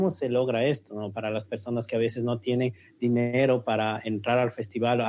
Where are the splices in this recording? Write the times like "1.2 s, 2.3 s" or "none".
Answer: none